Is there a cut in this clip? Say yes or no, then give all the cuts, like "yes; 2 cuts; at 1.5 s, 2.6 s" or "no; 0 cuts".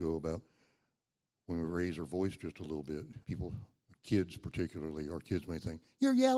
yes; 1 cut; at 3.2 s